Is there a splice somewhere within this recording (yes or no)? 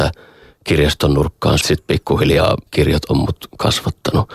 yes